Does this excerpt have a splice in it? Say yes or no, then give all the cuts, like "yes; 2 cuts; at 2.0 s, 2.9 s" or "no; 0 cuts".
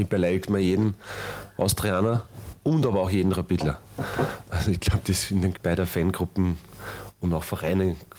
yes; 1 cut; at 5.5 s